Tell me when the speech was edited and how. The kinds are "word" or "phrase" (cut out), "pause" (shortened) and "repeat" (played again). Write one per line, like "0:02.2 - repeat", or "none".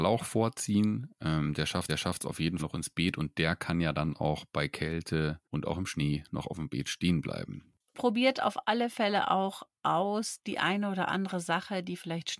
0:01.9 - repeat
0:02.6 - word
0:05.4 - pause

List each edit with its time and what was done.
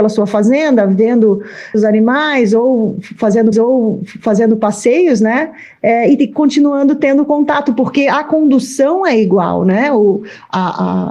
0:01.7 - word
0:03.5 - repeat

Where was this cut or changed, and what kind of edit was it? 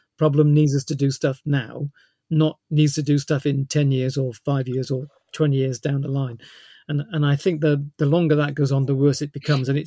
none

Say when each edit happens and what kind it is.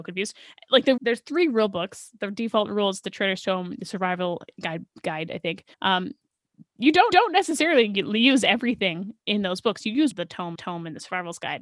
0:01.0 - phrase
0:05.7 - pause
0:07.1 - repeat
0:10.1 - phrase
0:10.5 - repeat

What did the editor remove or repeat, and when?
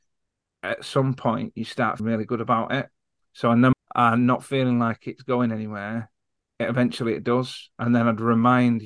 0:02.0 - word
0:03.7 - phrase

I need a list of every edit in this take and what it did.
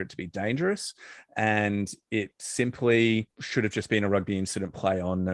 0:03.3 - pause

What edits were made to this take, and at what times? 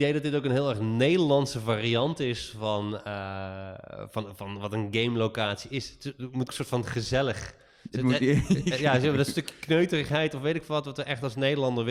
0:06.5 - word

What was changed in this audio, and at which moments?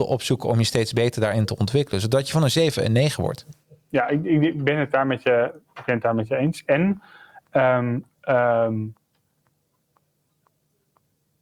none

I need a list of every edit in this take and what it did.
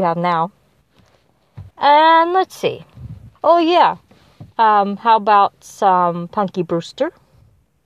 0:01.7 - pause
0:03.4 - pause
0:04.5 - pause

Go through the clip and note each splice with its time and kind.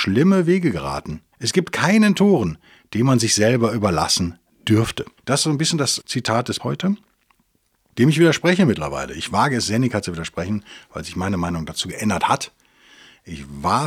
0:01.3 - pause
0:05.2 - pause
0:06.0 - word
0:06.6 - word

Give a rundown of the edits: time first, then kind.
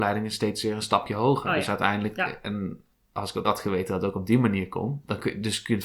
0:02.9 - word
0:03.4 - word

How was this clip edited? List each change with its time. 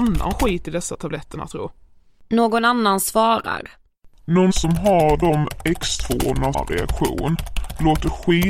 0:04.5 - word
0:06.5 - phrase

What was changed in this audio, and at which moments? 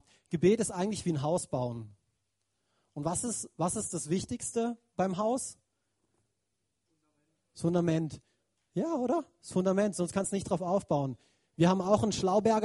none

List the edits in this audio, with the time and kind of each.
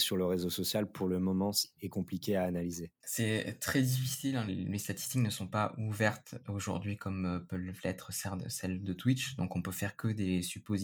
0:03.0 - pause
0:04.5 - word

